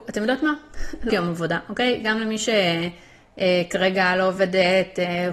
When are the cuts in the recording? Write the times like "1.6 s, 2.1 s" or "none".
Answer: 1.1 s